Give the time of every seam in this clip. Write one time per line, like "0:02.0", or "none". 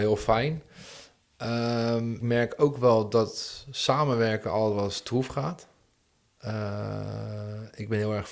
0:02.2